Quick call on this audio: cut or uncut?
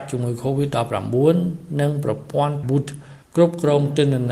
cut